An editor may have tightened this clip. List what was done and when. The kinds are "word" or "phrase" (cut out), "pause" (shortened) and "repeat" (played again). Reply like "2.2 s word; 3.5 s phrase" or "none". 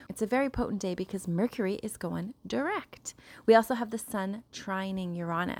none